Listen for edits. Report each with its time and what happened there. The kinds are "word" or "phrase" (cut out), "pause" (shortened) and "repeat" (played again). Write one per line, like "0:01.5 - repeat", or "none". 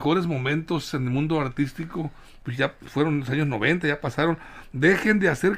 none